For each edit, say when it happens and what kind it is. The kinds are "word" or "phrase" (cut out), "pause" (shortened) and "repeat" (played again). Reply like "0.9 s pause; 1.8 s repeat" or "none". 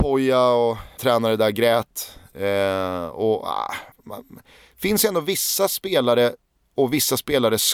1.0 s phrase; 3.9 s pause